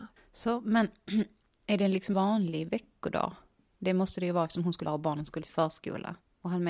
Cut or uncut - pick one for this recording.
cut